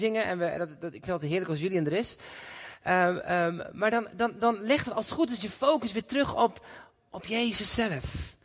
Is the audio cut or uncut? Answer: uncut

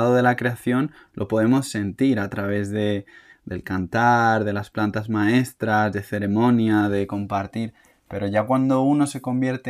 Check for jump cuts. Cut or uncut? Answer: uncut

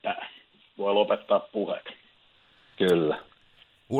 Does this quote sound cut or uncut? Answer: uncut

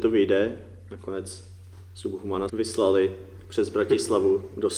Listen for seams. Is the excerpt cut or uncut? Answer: cut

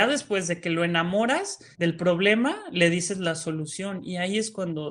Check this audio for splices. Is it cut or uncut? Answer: cut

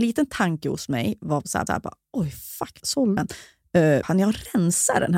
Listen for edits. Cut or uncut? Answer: cut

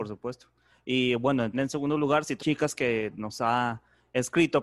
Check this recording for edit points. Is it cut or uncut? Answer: cut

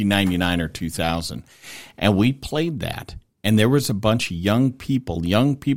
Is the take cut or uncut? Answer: uncut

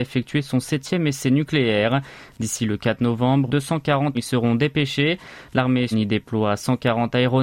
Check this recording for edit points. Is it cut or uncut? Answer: cut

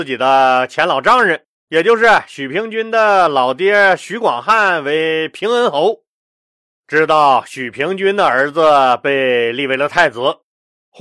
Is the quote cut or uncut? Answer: cut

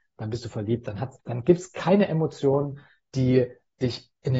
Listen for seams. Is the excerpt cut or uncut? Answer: cut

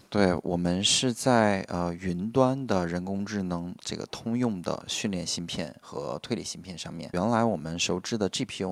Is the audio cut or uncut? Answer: cut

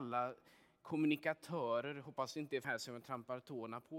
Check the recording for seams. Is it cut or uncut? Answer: cut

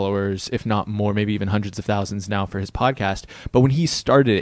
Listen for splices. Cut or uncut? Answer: uncut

